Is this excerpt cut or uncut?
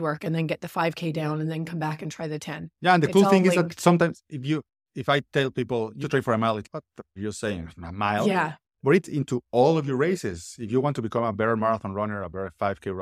cut